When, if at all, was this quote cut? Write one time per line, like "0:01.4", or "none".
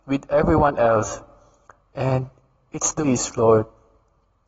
0:03.0